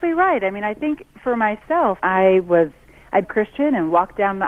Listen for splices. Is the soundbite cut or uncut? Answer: cut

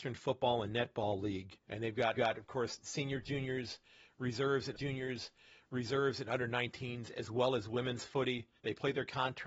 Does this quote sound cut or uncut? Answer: cut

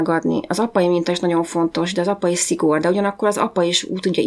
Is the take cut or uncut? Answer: uncut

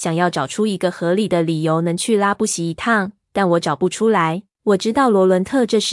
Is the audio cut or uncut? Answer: cut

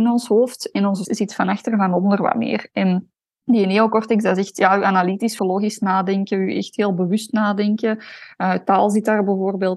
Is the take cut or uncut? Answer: cut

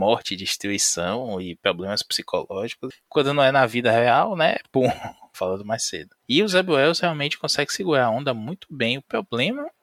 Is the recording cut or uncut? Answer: cut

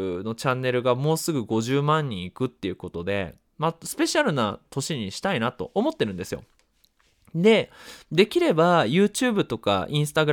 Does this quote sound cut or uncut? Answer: uncut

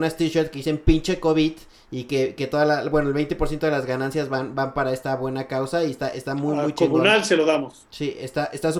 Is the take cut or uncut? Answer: uncut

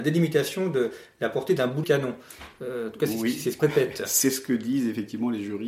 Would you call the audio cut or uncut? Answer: cut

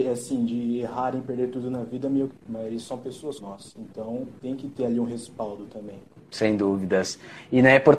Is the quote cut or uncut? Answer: cut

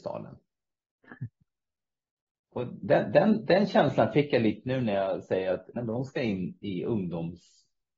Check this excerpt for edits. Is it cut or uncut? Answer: cut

